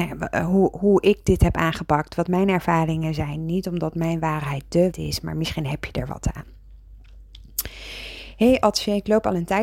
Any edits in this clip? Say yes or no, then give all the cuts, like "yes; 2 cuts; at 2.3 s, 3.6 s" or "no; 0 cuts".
yes; 1 cut; at 4.9 s